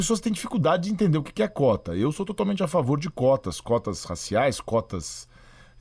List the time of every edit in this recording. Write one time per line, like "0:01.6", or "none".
none